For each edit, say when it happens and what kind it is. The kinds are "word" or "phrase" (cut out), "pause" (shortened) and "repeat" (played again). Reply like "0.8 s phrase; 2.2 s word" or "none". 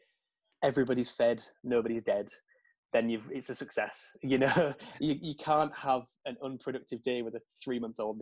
none